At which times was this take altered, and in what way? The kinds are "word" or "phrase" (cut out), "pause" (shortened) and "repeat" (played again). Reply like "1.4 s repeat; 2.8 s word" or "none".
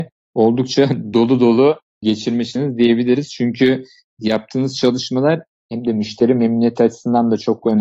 none